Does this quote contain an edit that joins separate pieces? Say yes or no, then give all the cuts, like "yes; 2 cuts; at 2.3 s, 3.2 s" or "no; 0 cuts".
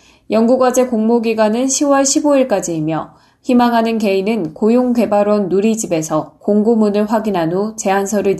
no; 0 cuts